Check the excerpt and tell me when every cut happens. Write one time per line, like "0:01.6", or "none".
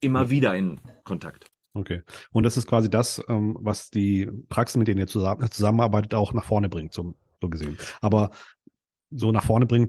none